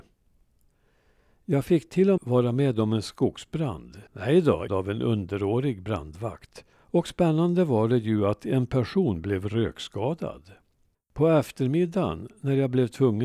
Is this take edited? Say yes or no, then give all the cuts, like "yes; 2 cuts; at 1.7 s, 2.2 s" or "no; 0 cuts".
yes; 5 cuts; at 2.2 s, 4.1 s, 4.7 s, 6.7 s, 10.9 s